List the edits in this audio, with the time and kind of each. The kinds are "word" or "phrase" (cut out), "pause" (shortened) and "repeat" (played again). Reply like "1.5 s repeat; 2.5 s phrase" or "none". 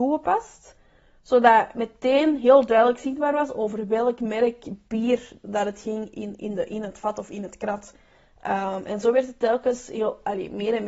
none